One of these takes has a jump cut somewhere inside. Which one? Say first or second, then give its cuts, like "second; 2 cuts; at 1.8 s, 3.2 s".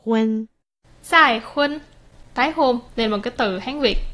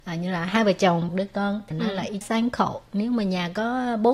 second; 3 cuts; at 1.1 s, 1.7 s, 2.2 s